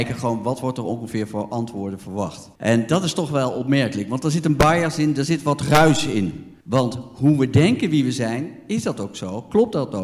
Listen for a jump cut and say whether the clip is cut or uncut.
cut